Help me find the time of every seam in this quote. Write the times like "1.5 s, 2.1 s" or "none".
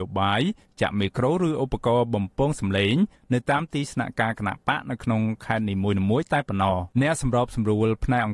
6.9 s